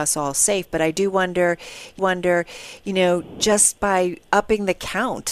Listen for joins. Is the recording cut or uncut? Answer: cut